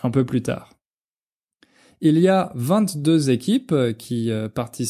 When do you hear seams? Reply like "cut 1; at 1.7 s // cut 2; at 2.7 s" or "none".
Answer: none